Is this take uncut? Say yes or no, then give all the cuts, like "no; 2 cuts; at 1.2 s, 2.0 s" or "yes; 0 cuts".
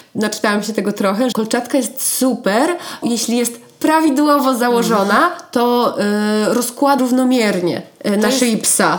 no; 3 cuts; at 1.3 s, 3.0 s, 7.0 s